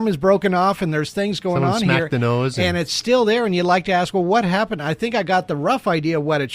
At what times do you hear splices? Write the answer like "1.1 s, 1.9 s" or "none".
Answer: none